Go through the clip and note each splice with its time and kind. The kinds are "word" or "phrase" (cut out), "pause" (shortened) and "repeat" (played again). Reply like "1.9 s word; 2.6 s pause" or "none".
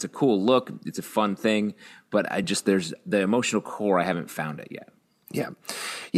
none